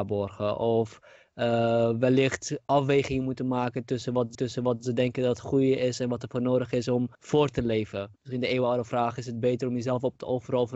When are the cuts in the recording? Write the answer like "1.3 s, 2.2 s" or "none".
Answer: 4.3 s, 7.1 s, 8.2 s